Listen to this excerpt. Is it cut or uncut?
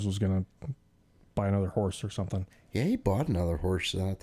cut